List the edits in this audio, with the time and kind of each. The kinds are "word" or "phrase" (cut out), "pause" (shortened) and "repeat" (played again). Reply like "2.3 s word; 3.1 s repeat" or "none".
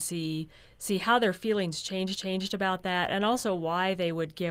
2.2 s repeat